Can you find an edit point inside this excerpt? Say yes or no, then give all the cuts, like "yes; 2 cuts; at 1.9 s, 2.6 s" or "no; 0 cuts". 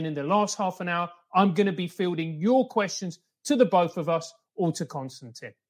no; 0 cuts